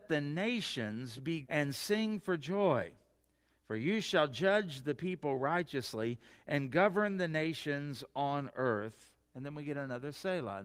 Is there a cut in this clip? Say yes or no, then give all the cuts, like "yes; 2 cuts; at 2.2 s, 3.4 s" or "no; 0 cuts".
yes; 1 cut; at 1.4 s